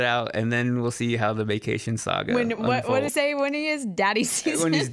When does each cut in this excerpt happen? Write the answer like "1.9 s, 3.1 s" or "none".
3.1 s